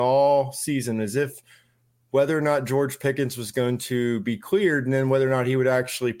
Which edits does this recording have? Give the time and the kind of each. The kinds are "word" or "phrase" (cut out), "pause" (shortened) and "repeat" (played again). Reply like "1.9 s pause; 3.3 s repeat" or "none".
none